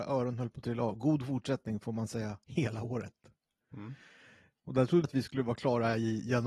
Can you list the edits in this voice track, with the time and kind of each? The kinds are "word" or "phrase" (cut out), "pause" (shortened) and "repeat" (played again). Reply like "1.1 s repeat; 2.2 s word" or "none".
2.4 s pause; 5.0 s word